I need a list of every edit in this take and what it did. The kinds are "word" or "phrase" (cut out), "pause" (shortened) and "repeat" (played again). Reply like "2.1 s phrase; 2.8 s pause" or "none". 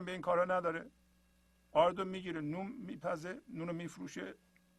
none